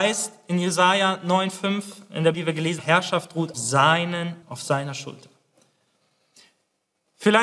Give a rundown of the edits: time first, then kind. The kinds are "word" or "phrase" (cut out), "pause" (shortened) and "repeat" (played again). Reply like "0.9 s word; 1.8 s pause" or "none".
2.3 s word; 2.8 s word; 3.5 s word; 4.4 s word